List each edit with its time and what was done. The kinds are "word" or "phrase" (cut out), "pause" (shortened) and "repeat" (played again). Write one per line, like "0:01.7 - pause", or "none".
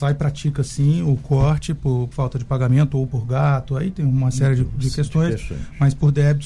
0:02.1 - word
0:03.1 - phrase